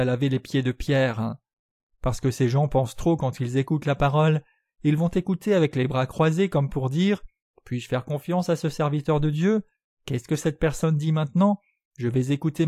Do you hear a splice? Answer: no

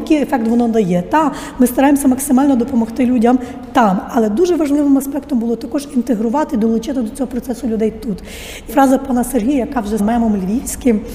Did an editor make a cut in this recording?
yes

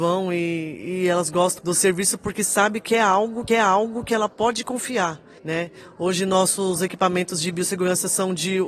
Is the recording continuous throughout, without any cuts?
no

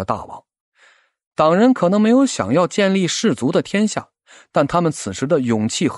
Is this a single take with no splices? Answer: yes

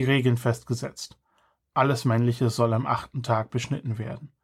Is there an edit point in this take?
no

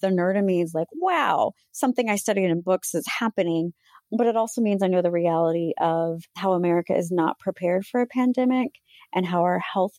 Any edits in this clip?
yes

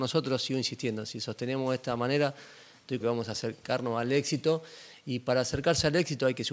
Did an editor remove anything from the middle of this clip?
yes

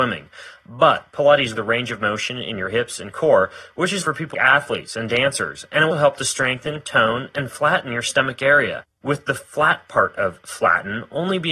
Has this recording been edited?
yes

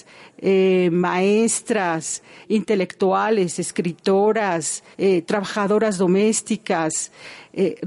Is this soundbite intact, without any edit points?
no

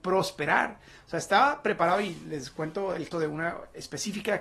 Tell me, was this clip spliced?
yes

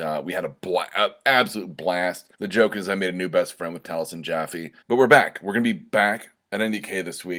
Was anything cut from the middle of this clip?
yes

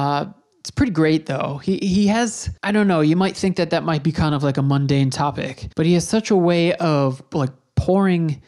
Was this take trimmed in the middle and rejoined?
yes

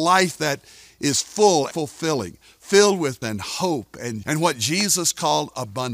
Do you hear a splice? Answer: yes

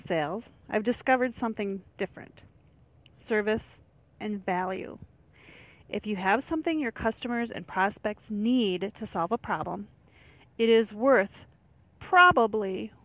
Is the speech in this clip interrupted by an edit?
yes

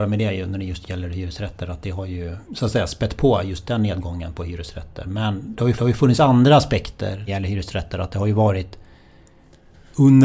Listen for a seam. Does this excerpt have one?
yes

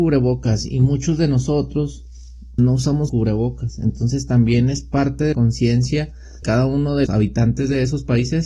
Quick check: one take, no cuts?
no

